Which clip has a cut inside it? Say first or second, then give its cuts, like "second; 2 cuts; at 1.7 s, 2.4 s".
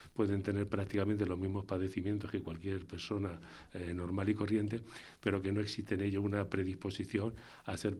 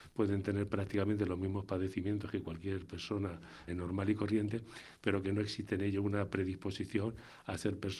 second; 1 cut; at 3.7 s